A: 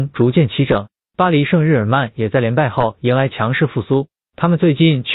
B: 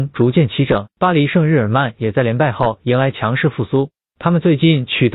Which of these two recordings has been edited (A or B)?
B